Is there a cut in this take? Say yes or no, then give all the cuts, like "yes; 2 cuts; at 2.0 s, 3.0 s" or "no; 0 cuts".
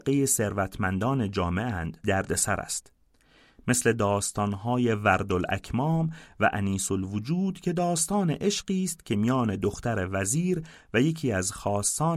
yes; 1 cut; at 2.0 s